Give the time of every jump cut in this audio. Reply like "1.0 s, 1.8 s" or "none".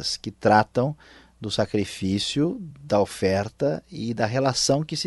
none